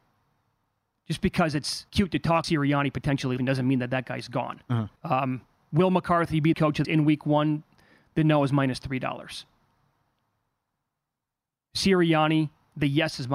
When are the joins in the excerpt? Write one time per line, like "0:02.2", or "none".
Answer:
0:01.9
0:02.4
0:03.4
0:05.0
0:06.5
0:06.8